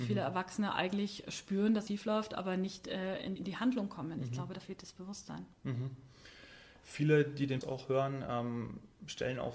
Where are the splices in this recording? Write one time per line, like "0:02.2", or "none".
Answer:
0:01.9
0:03.4
0:07.6